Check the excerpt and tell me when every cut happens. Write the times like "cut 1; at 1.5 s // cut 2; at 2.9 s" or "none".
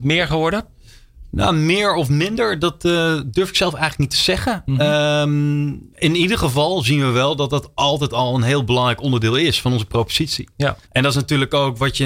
cut 1; at 5.9 s // cut 2; at 10.8 s